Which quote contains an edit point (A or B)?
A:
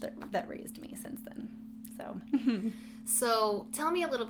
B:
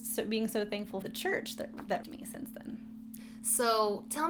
B